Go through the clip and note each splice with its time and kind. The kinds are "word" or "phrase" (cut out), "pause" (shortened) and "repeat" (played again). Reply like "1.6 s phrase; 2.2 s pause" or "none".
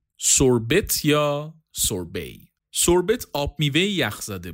2.6 s pause